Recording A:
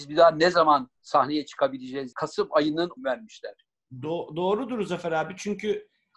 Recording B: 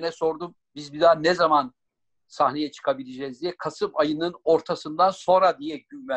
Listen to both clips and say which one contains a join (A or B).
A